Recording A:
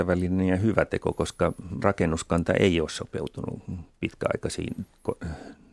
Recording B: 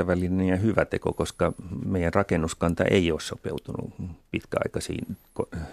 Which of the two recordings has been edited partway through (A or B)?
A